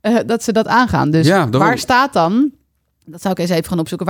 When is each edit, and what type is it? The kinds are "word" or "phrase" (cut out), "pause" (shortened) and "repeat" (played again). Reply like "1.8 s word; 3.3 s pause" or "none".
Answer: none